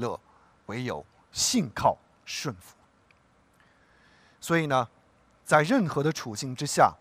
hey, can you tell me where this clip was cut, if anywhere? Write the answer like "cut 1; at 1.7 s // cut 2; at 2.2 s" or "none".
none